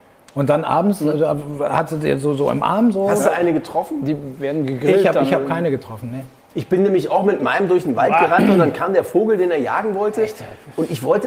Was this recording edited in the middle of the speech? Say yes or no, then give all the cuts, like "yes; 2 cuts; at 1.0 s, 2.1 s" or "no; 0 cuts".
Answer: no; 0 cuts